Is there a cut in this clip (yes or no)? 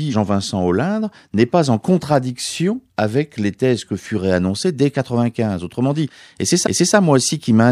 yes